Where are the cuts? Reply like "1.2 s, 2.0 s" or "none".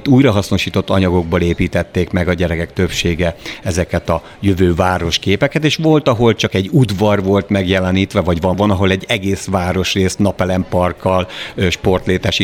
8.5 s